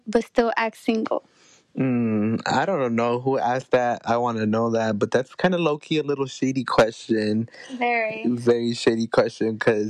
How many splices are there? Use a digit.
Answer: 0